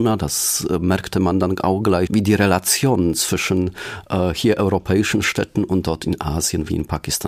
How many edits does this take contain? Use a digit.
1